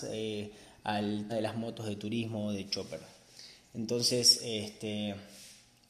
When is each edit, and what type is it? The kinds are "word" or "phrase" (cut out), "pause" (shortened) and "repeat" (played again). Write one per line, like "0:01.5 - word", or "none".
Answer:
0:01.3 - word